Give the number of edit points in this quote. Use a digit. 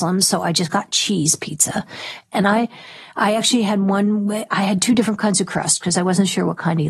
0